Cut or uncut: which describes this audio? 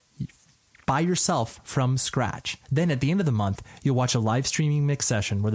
cut